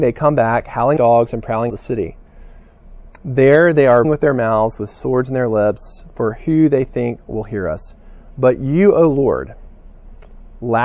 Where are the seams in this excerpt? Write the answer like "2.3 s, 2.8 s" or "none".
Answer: 1.0 s, 1.7 s, 4.0 s